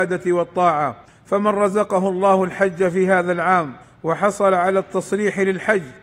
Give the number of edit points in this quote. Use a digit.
2